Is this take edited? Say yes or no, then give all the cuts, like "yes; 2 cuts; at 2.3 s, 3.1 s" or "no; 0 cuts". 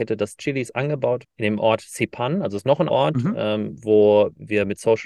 yes; 2 cuts; at 1.2 s, 2.9 s